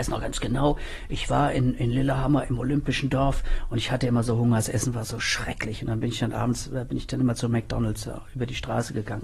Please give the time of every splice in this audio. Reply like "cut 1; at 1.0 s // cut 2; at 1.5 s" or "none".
none